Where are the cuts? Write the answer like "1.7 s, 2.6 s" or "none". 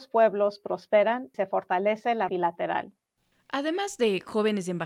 1.3 s, 2.3 s

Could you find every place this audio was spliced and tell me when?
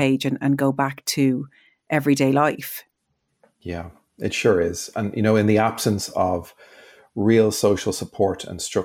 none

